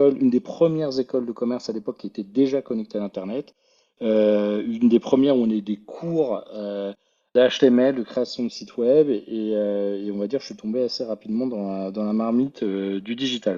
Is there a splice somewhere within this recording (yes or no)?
no